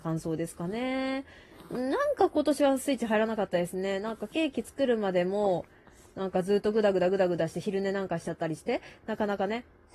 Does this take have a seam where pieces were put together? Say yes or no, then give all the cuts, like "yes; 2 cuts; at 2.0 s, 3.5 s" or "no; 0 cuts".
no; 0 cuts